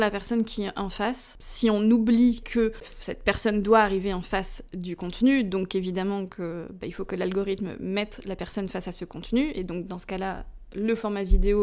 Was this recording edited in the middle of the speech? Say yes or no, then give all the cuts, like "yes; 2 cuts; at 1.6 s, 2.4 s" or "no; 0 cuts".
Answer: yes; 1 cut; at 2.4 s